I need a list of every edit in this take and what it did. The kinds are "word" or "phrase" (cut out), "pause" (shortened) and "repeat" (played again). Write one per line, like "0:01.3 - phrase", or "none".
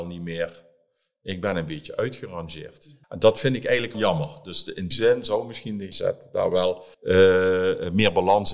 0:03.0 - pause
0:03.9 - word
0:04.9 - word
0:05.9 - word
0:06.9 - pause

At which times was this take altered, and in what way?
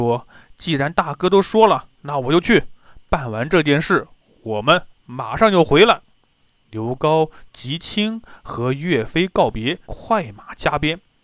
0:09.8 - pause

